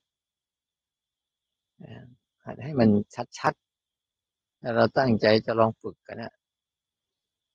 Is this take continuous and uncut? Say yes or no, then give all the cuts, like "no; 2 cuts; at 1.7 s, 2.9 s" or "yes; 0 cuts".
yes; 0 cuts